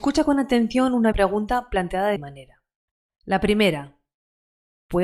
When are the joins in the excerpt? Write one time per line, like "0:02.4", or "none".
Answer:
0:01.1
0:02.2